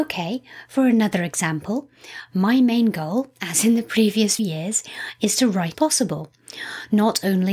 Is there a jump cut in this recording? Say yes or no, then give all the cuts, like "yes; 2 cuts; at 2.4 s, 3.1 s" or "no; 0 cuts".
yes; 2 cuts; at 4.4 s, 5.7 s